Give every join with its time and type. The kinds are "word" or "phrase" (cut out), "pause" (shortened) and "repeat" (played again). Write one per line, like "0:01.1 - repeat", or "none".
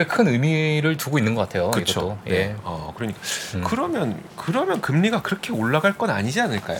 0:04.3 - pause